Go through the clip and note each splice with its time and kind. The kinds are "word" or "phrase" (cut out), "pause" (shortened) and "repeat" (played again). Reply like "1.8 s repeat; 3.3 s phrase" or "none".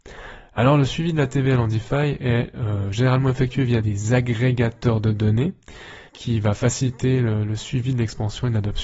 6.1 s pause